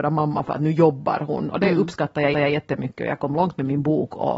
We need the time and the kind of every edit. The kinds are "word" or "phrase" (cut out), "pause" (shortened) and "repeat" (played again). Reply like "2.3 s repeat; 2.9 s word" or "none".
2.3 s repeat